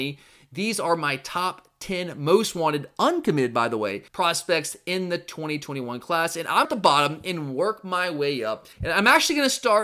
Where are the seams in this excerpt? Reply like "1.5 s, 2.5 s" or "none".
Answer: 4.1 s, 6.6 s, 8.7 s